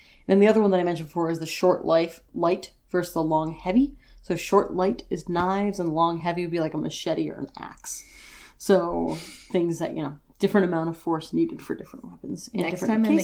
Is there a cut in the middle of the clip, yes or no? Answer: no